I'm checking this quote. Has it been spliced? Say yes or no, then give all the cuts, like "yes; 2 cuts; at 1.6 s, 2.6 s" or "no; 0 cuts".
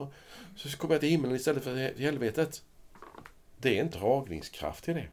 yes; 1 cut; at 3.9 s